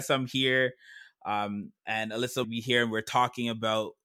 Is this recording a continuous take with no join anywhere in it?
no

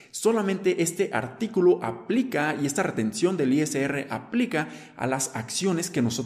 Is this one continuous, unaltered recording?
yes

